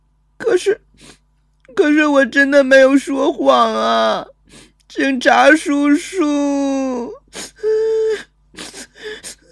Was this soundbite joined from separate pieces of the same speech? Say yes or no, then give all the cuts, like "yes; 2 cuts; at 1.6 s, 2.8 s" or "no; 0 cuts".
no; 0 cuts